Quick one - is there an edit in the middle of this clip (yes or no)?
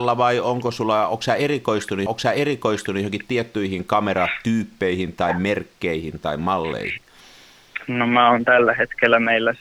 yes